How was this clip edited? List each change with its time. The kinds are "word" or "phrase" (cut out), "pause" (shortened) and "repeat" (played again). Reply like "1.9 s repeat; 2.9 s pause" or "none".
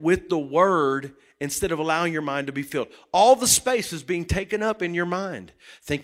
none